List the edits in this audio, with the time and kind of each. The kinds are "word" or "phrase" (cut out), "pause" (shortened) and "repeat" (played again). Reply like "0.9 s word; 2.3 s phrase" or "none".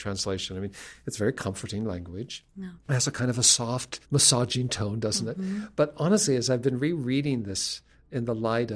2.8 s pause; 4.0 s pause